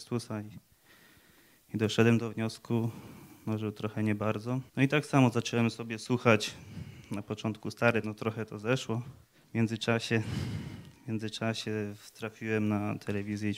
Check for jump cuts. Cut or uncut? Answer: cut